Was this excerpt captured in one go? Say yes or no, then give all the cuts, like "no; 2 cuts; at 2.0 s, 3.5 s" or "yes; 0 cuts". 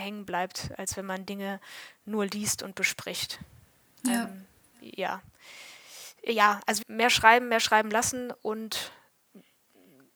no; 1 cut; at 6.8 s